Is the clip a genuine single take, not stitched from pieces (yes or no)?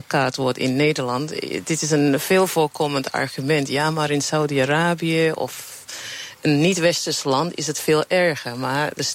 yes